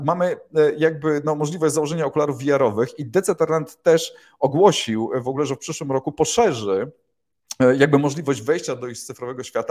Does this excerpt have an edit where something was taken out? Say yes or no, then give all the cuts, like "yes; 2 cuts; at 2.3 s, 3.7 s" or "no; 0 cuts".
no; 0 cuts